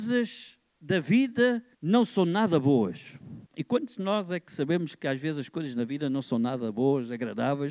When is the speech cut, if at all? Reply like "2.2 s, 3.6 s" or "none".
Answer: 1.7 s, 3.5 s